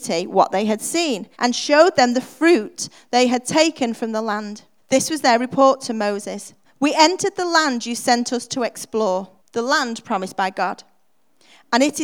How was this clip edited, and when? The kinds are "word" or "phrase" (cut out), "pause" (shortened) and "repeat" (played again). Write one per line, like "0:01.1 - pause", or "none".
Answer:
0:01.3 - pause
0:04.8 - pause
0:06.6 - pause
0:09.4 - pause